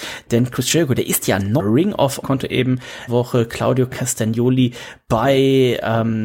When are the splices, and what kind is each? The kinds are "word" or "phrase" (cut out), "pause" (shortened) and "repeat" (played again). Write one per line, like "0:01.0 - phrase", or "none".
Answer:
0:01.6 - word
0:02.2 - phrase
0:03.1 - word